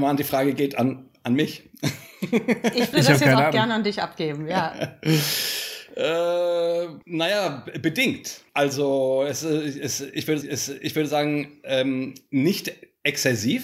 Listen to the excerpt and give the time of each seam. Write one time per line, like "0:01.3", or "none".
0:02.9
0:07.0
0:08.5
0:10.4